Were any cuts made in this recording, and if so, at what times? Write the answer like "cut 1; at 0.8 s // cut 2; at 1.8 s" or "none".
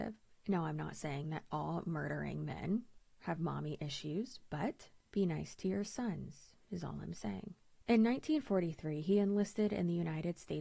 none